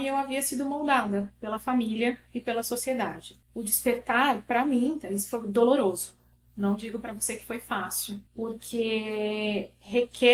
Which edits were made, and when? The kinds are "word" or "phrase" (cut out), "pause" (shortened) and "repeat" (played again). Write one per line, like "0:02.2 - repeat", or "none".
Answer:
0:08.3 - pause